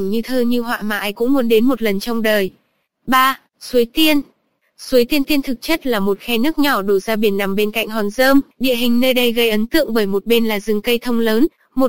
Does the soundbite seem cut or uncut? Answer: cut